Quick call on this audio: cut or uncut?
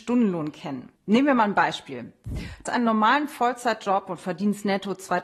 cut